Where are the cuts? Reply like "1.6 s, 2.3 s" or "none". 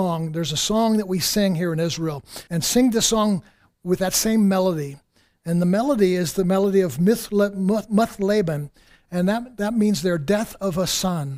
2.5 s